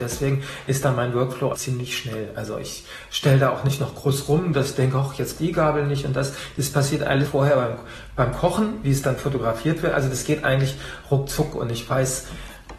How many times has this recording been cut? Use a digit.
3